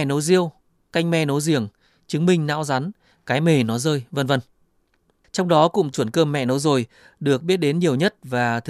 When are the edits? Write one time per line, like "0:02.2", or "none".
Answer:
0:05.9